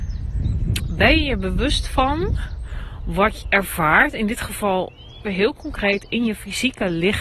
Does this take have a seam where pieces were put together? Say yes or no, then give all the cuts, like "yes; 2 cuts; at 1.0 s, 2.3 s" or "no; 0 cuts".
yes; 2 cuts; at 3.4 s, 5.2 s